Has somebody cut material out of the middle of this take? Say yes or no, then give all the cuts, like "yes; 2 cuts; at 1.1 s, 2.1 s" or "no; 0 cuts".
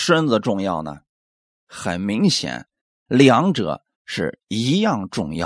no; 0 cuts